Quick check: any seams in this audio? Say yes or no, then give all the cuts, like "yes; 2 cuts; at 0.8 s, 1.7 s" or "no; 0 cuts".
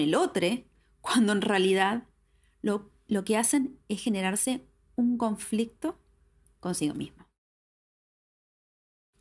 no; 0 cuts